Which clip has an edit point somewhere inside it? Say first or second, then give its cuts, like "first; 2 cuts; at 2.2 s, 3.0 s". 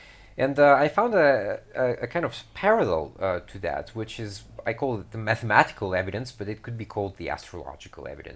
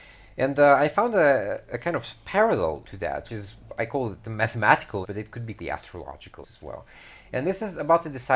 second; 6 cuts; at 1.7 s, 2.8 s, 3.3 s, 5.0 s, 5.6 s, 6.4 s